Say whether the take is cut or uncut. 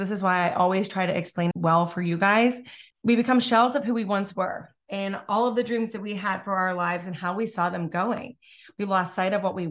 cut